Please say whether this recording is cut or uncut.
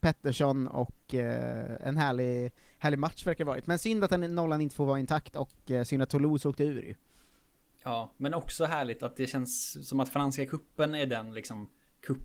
uncut